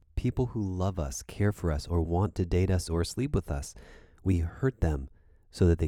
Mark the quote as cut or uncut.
uncut